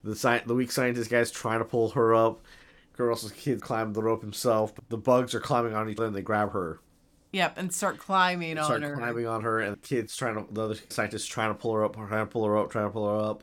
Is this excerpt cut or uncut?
cut